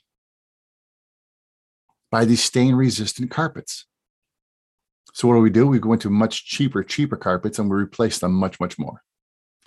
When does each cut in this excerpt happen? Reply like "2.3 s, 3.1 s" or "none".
none